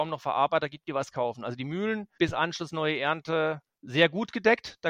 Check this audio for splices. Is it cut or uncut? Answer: cut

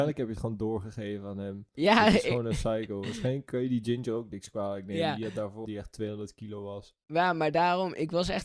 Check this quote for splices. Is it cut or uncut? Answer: cut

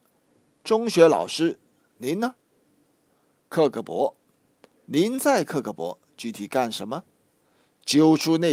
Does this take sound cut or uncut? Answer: uncut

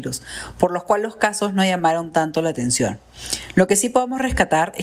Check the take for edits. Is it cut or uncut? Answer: uncut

